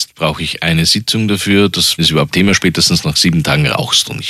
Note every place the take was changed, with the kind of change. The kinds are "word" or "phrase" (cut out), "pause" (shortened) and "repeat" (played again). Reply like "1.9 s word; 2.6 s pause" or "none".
2.0 s word; 2.3 s word

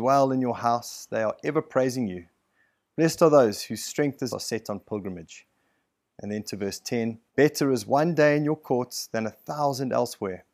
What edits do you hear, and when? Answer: 4.3 s phrase; 7.3 s pause

